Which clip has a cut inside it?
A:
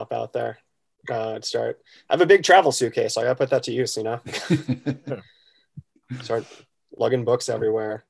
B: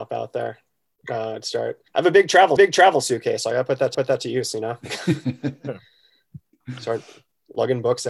B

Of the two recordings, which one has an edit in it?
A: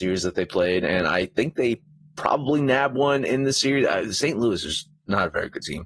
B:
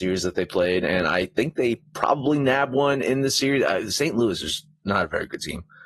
B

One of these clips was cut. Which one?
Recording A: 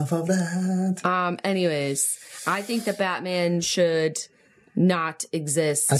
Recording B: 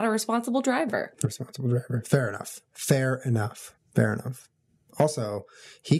B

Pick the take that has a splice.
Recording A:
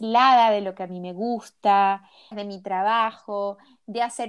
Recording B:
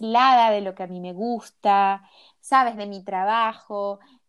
A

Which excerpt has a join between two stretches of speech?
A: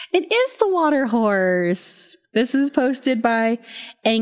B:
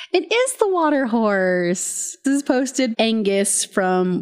B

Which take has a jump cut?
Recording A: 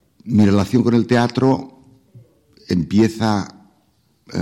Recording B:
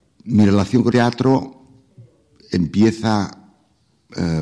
B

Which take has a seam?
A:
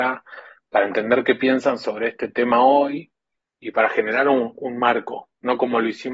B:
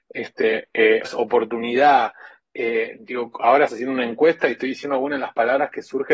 B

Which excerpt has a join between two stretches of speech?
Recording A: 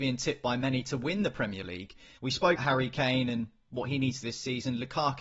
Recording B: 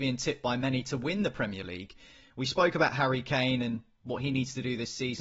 A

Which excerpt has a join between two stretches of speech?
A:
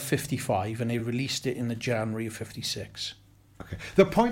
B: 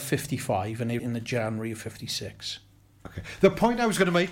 B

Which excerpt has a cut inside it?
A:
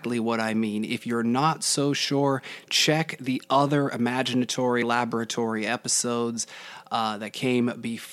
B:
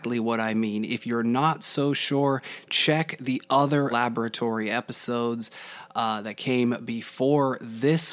B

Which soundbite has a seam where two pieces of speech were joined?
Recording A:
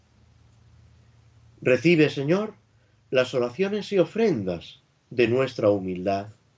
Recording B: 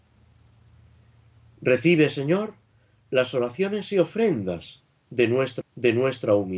B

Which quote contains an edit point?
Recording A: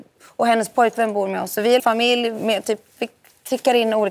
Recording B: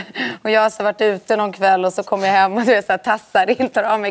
A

